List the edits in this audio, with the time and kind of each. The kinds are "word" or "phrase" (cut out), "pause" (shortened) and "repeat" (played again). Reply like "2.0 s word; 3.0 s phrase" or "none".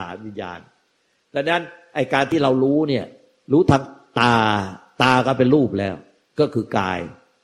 none

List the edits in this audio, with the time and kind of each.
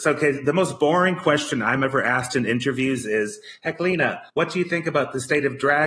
4.3 s pause

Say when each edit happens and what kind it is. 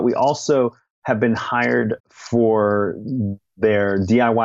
2.0 s pause

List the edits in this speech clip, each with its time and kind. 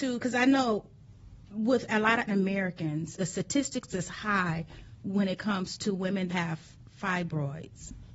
2.3 s word; 3.2 s word; 6.3 s word

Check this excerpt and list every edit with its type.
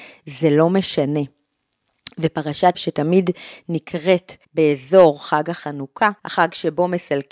2.7 s word; 4.4 s pause; 6.2 s pause

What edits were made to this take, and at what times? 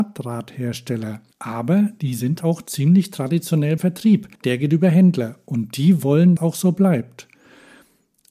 1.3 s pause; 2.4 s word; 3.8 s word; 4.3 s pause; 6.4 s phrase

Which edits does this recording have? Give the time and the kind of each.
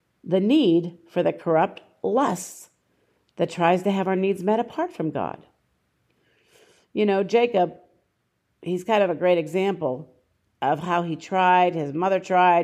none

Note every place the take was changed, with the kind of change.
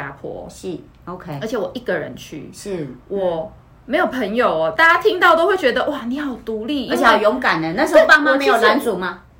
none

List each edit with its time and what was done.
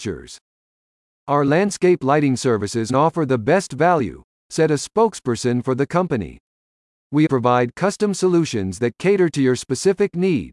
2.9 s phrase; 7.3 s word

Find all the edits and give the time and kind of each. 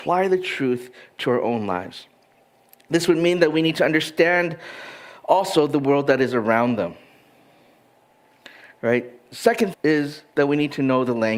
9.7 s word

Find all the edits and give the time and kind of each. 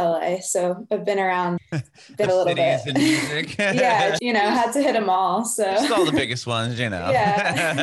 1.6 s word; 2.3 s word; 4.2 s word

